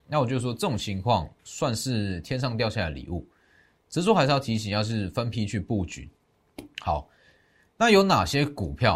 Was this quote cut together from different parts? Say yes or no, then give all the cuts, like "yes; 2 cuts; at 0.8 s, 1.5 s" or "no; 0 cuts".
yes; 1 cut; at 1.4 s